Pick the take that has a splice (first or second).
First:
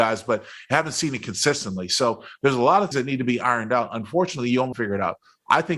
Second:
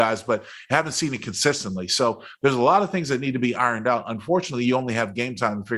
first